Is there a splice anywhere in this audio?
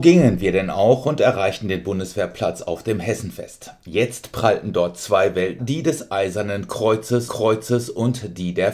yes; 2 cuts; at 5.6 s, 7.3 s

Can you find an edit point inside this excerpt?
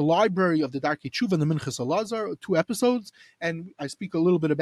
no; 0 cuts

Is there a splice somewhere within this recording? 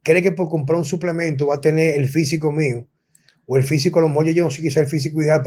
no; 0 cuts

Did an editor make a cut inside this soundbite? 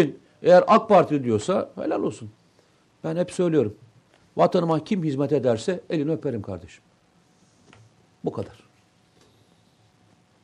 no; 0 cuts

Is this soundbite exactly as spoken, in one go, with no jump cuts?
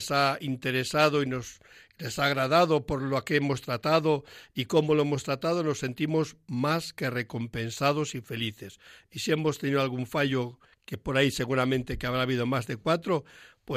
yes; 0 cuts

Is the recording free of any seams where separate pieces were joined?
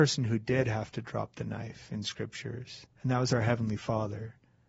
no; 1 cut; at 2.9 s

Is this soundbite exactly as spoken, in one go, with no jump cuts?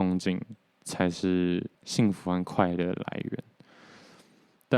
no; 1 cut; at 1.7 s

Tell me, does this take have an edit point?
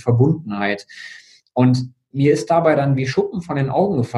no; 0 cuts

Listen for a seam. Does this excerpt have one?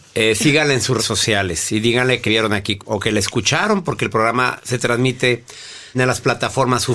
yes; 4 cuts; at 1.0 s, 2.3 s, 2.8 s, 5.9 s

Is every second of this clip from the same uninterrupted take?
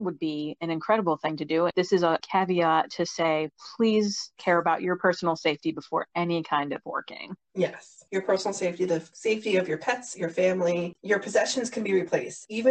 yes; 0 cuts

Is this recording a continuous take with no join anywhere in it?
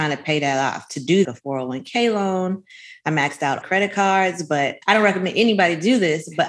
no; 3 cuts; at 1.2 s, 3.6 s, 4.8 s

